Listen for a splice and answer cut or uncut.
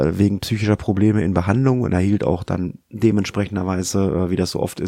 cut